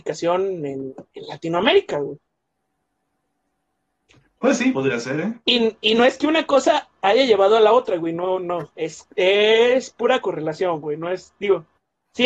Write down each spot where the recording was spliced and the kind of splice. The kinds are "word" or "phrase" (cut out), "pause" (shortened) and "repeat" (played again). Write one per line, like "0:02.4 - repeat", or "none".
0:04.7 - word